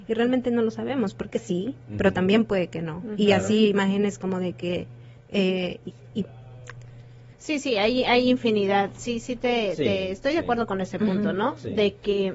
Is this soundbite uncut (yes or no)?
no